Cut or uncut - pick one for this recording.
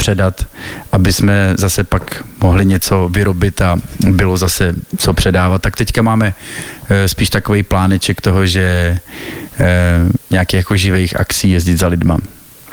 uncut